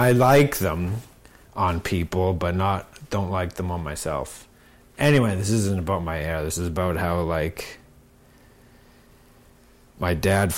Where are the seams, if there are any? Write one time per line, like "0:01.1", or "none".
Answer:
none